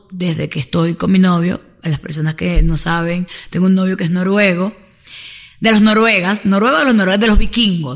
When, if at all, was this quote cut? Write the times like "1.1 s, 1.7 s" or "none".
none